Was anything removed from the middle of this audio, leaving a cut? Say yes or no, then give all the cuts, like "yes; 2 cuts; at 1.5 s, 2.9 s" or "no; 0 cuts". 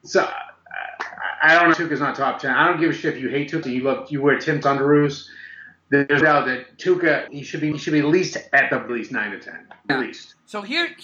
yes; 8 cuts; at 1.7 s, 3.6 s, 4.6 s, 6.2 s, 7.3 s, 7.7 s, 8.9 s, 9.9 s